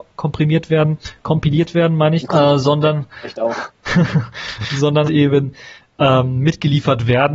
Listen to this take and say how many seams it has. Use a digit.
3